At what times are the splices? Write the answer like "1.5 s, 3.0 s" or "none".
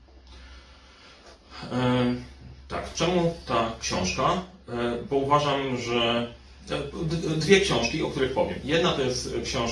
none